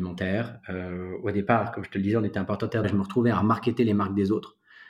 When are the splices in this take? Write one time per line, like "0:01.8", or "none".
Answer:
0:02.8

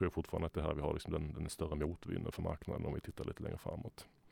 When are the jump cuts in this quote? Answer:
none

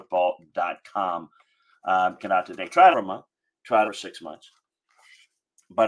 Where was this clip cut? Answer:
0:02.2
0:02.9
0:03.8

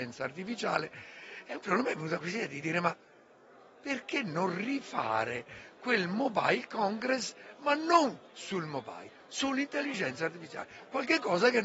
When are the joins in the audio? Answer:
none

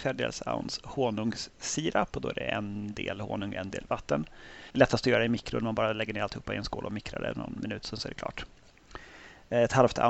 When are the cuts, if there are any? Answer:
0:04.7

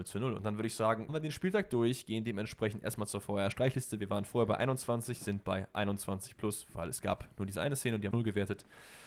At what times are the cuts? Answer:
0:01.1
0:08.1

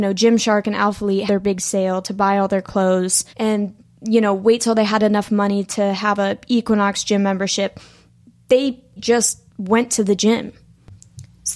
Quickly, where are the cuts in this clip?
0:01.3
0:03.3
0:09.0
0:09.5

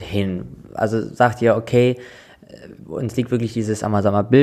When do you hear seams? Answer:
none

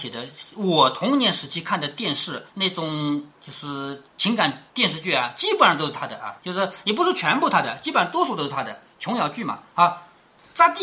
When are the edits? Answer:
0:02.5
0:03.3
0:04.1
0:04.7
0:06.4
0:09.7

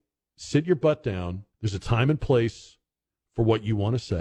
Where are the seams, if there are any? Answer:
0:01.5

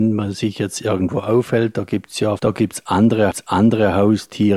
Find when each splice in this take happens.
0:02.4
0:03.3

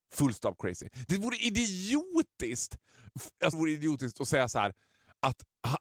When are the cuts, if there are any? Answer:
0:03.5

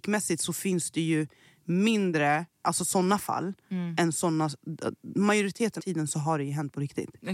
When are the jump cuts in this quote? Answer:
0:02.5
0:05.8

